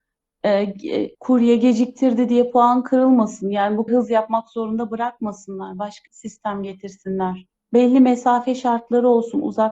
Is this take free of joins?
no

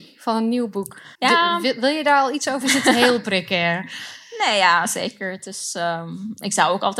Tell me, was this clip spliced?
yes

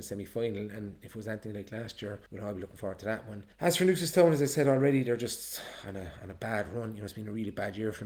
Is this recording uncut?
no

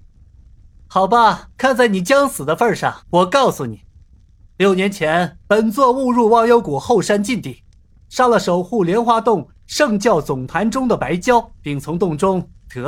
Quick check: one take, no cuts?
no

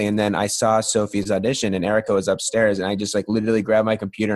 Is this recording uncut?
yes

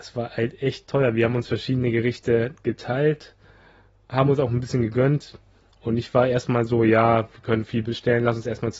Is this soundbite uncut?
yes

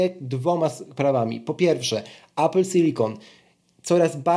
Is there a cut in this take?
no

